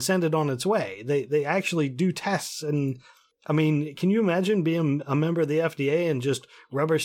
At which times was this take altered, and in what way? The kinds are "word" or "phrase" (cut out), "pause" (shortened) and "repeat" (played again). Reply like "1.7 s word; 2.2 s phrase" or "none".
none